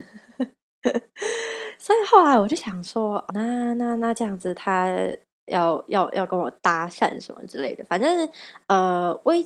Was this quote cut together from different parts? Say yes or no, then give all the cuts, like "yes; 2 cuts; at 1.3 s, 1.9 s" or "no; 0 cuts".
yes; 1 cut; at 3.3 s